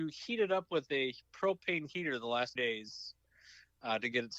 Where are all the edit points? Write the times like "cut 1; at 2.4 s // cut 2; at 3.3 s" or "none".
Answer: cut 1; at 1.2 s // cut 2; at 2.6 s